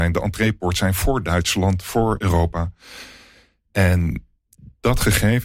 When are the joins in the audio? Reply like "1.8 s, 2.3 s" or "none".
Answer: 2.2 s